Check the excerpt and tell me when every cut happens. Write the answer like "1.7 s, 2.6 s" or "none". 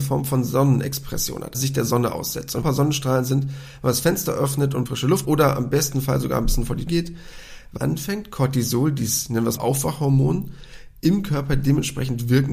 1.5 s, 2.6 s, 4.9 s, 5.2 s, 6.9 s, 7.8 s, 9.6 s